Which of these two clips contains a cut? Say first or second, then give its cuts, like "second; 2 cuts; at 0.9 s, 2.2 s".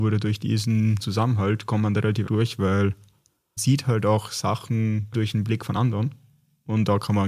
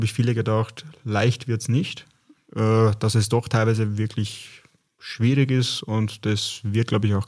first; 4 cuts; at 1.0 s, 2.2 s, 3.6 s, 5.1 s